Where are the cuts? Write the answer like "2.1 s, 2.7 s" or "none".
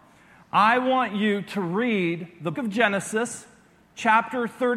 2.5 s

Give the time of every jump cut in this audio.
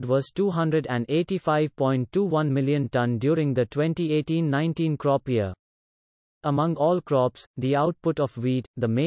none

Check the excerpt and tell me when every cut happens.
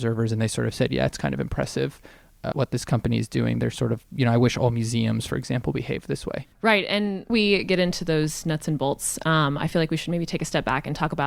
2.5 s, 6.5 s, 7.3 s

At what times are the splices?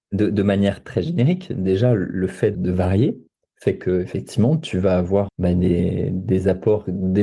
2.5 s, 5.3 s

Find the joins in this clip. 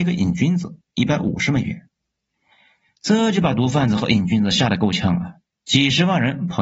none

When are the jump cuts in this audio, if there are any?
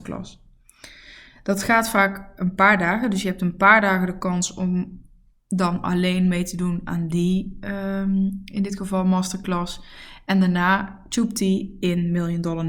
none

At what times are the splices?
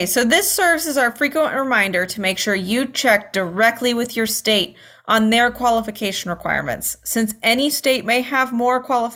none

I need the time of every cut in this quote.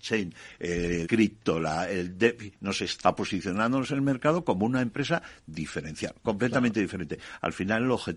1.0 s, 3.0 s

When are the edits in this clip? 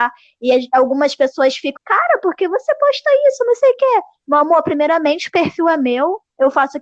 1.8 s

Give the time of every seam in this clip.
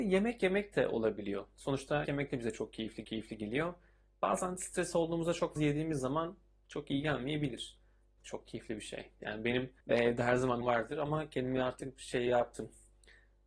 2.1 s, 3.0 s, 5.6 s, 8.2 s, 9.8 s, 10.6 s

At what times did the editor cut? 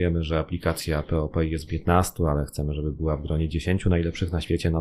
1.7 s

